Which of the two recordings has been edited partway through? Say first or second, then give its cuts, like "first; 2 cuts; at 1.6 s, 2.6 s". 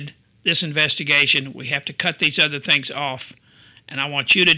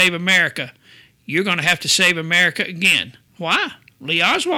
second; 1 cut; at 3.3 s